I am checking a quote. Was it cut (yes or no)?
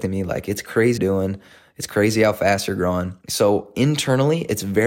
yes